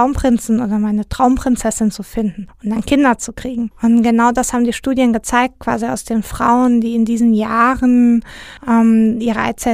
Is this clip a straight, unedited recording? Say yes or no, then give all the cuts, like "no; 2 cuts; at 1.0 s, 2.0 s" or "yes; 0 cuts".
yes; 0 cuts